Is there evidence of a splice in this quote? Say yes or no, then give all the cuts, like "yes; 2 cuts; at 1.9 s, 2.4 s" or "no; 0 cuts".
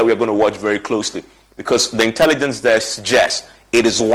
no; 0 cuts